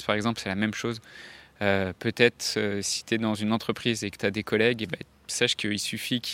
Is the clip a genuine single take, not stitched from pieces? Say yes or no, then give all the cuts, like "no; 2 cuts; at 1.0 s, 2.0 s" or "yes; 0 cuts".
yes; 0 cuts